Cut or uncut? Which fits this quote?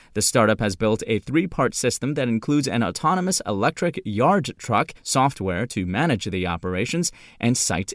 cut